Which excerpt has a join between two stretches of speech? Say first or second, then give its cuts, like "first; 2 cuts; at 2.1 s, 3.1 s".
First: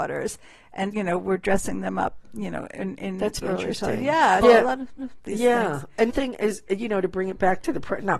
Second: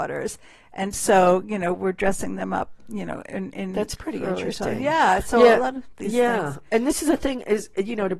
first; 5 cuts; at 0.9 s, 3.4 s, 4.4 s, 5.0 s, 6.1 s